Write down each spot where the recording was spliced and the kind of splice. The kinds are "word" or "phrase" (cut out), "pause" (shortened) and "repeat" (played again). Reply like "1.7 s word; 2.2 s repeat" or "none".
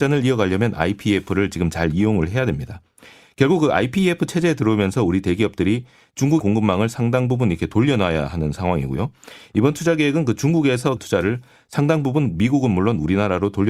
6.4 s word; 11.0 s phrase